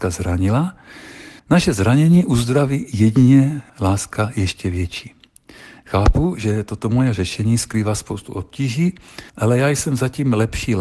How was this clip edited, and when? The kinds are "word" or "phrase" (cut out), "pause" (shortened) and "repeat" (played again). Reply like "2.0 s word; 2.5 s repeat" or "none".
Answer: 1.4 s pause; 3.7 s pause; 9.3 s pause